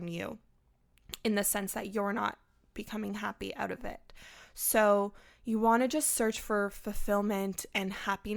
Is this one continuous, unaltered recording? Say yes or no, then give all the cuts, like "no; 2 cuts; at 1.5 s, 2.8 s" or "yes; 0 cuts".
yes; 0 cuts